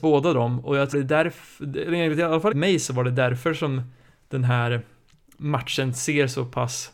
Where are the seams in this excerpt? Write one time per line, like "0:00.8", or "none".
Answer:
0:00.9
0:02.5